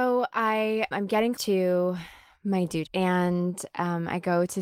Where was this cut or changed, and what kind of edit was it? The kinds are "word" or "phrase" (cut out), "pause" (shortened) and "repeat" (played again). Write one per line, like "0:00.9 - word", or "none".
0:00.9 - word
0:01.4 - word
0:02.9 - word